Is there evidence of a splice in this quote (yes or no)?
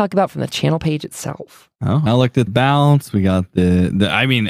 yes